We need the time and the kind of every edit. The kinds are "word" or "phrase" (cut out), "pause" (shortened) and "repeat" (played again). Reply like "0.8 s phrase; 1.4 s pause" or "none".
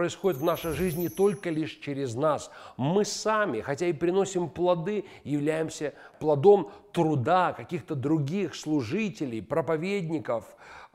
none